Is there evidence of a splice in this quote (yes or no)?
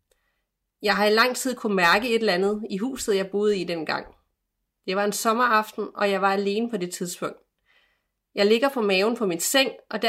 no